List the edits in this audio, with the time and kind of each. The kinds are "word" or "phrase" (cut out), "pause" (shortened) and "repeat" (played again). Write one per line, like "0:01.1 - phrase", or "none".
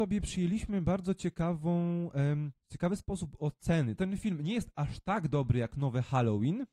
0:02.6 - pause
0:04.0 - phrase